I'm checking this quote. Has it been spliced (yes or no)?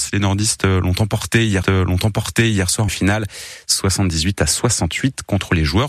yes